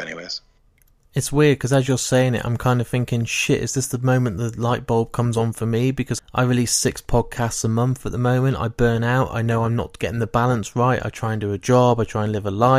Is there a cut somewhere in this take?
yes; 1 cut; at 6.2 s

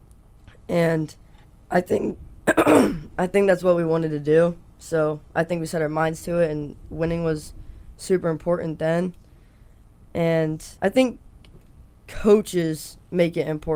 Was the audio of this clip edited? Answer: yes; 2 cuts; at 1.4 s, 10.8 s

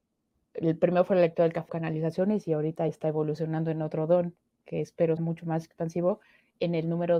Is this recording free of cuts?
no; 3 cuts; at 1.7 s, 2.9 s, 5.2 s

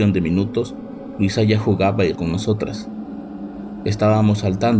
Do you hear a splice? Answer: yes; 1 cut; at 2.1 s

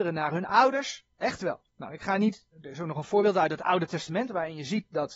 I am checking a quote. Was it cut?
yes; 3 cuts; at 1.1 s, 1.7 s, 2.5 s

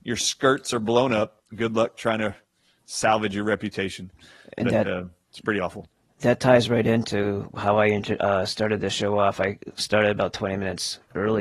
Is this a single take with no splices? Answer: yes; 0 cuts

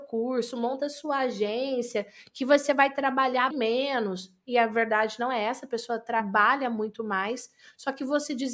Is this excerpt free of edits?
no; 1 cut; at 3.5 s

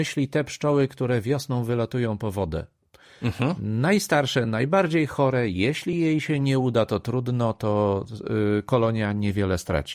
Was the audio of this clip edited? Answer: no; 0 cuts

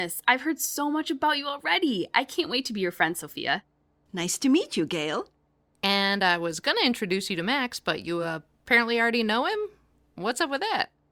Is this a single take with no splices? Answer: yes; 0 cuts

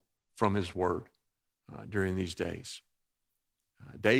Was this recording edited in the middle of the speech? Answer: no; 0 cuts

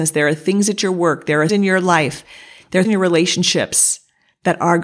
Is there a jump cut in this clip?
yes; 2 cuts; at 1.5 s, 2.8 s

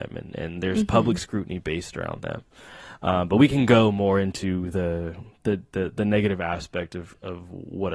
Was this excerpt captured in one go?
yes; 0 cuts

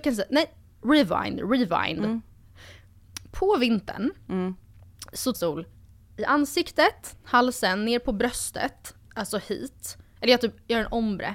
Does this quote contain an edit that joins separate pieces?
yes; 3 cuts; at 5.3 s, 5.8 s, 9.1 s

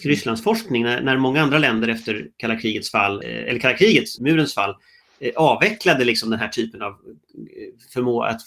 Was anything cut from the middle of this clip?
yes; 2 cuts; at 3.2 s, 4.2 s

